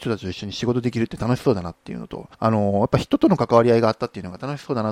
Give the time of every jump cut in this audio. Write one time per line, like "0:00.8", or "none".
0:02.3